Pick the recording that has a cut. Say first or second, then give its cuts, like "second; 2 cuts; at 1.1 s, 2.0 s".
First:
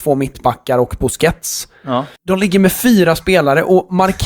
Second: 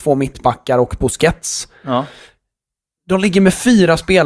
first; 1 cut; at 2.2 s